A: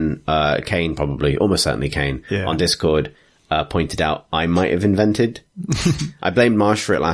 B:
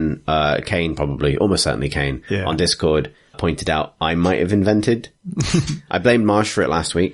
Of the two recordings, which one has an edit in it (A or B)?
B